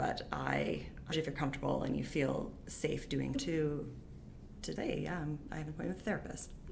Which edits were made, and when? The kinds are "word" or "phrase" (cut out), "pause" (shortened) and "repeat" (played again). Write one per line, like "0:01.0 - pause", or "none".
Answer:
0:01.1 - word
0:03.3 - word
0:04.8 - word